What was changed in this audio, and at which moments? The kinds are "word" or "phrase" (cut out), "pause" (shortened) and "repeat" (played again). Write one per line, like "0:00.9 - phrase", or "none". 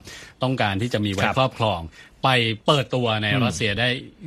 0:02.6 - pause